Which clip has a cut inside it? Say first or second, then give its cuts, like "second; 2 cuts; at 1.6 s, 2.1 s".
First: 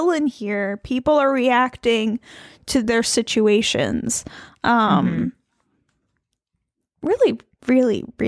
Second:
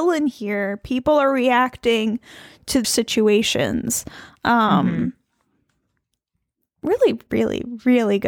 second; 2 cuts; at 2.8 s, 7.3 s